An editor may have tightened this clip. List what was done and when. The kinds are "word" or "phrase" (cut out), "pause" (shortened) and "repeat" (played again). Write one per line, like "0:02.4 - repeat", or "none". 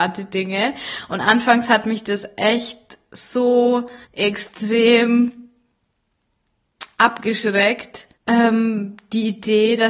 0:04.0 - pause
0:08.2 - pause